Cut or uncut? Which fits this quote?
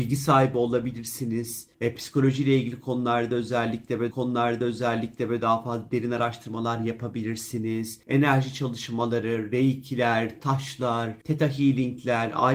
cut